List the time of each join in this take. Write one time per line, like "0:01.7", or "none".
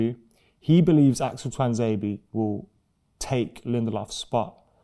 none